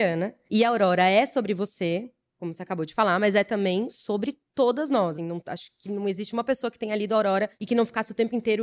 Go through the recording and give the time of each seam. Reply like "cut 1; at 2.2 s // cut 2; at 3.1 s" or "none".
cut 1; at 4.5 s // cut 2; at 5.1 s